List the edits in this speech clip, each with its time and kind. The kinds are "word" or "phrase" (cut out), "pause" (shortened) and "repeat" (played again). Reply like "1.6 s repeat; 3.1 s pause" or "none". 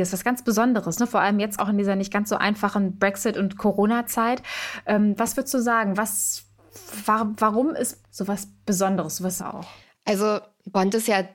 1.6 s word; 8.0 s phrase; 8.6 s pause; 9.4 s word